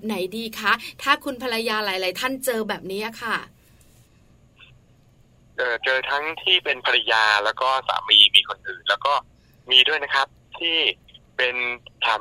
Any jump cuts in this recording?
no; 0 cuts

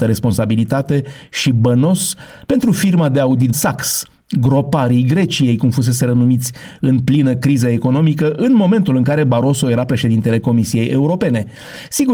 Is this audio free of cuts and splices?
no; 1 cut; at 3.5 s

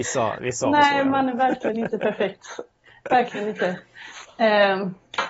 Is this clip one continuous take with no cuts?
yes; 0 cuts

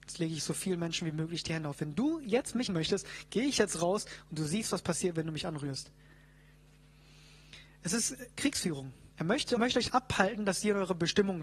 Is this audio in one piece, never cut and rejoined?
no; 4 cuts; at 2.7 s, 9.1 s, 9.6 s, 9.9 s

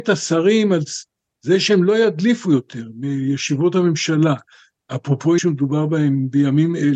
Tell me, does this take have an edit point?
yes; 1 cut; at 5.4 s

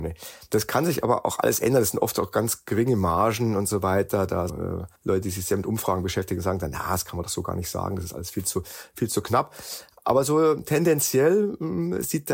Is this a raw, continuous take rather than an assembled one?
no; 2 cuts; at 4.5 s, 5.0 s

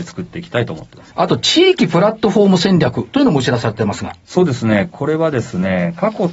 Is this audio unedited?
no; 1 cut; at 1.1 s

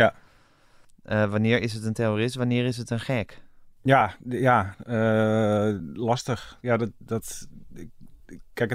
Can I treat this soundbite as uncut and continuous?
yes; 0 cuts

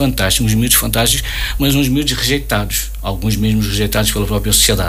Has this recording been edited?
no; 0 cuts

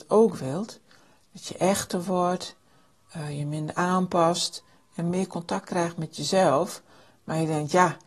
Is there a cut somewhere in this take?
no; 0 cuts

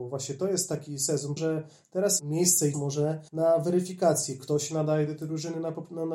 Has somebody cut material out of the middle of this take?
yes; 4 cuts; at 1.4 s, 2.2 s, 2.7 s, 3.3 s

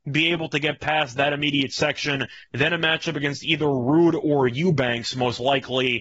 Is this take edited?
no; 0 cuts

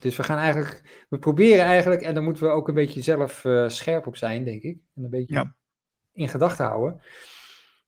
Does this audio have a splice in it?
no; 0 cuts

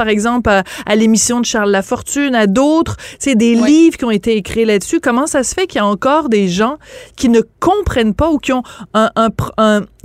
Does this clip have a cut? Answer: no; 0 cuts

